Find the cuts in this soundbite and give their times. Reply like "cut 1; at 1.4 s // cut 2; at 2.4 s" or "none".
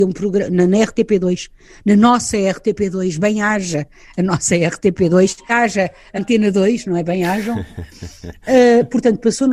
cut 1; at 5.5 s // cut 2; at 6.2 s